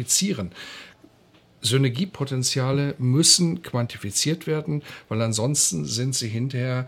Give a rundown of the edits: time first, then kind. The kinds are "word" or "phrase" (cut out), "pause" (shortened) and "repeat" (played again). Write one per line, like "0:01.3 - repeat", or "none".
none